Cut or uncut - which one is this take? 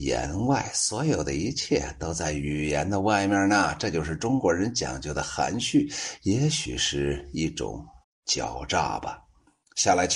cut